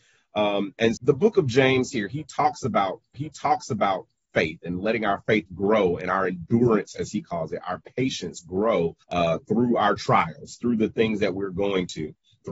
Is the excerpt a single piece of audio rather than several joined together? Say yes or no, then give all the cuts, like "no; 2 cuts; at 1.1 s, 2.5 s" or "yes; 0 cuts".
no; 3 cuts; at 1.0 s, 3.1 s, 9.0 s